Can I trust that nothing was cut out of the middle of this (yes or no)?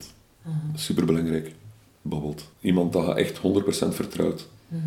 no